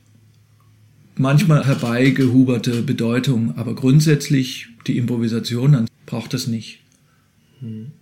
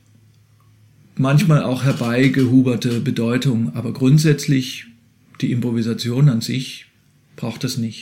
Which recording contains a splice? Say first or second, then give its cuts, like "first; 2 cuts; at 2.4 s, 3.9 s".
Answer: first; 3 cuts; at 1.6 s, 4.8 s, 5.9 s